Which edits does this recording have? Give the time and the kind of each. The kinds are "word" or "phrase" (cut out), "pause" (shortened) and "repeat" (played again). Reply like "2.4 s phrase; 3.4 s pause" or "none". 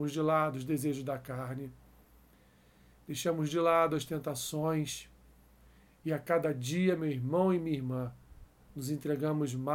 none